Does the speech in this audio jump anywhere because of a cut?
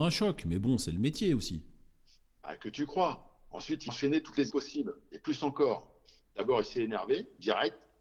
yes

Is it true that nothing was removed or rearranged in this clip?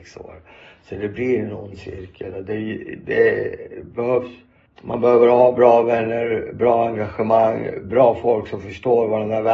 no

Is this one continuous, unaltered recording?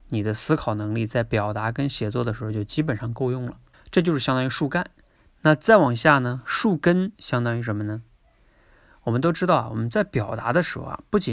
no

